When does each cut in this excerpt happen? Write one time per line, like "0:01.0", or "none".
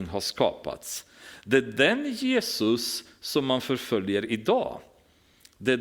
none

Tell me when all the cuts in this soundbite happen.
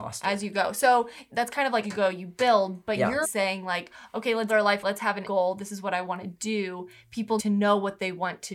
0:01.3
0:01.8
0:03.2
0:04.5
0:04.8
0:05.2
0:07.4

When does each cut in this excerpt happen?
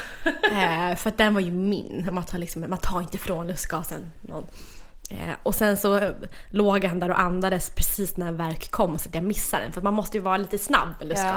none

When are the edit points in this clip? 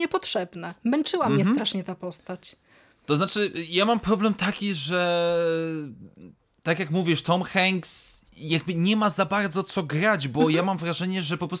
none

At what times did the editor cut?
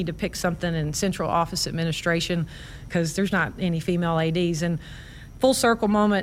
0:03.3

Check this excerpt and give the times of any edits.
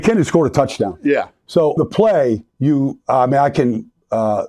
0:01.8
0:02.5

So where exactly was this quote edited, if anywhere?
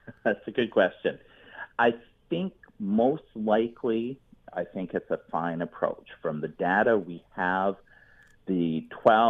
none

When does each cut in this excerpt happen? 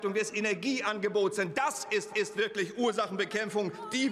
0:02.1

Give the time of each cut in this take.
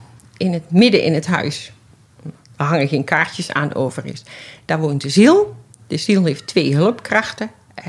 none

